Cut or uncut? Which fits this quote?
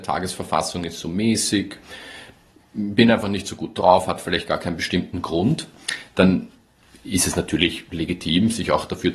uncut